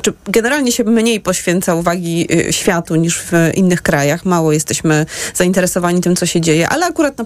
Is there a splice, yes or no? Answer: no